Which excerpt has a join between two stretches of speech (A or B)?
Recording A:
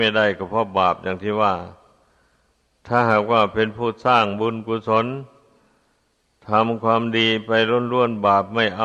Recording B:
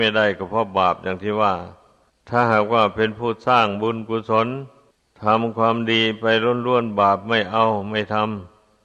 B